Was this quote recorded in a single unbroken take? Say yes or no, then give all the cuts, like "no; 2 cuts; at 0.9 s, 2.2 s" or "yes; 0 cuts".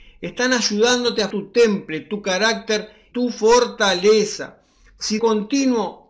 no; 3 cuts; at 1.3 s, 3.1 s, 5.2 s